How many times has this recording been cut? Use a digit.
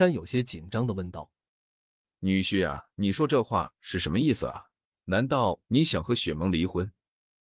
3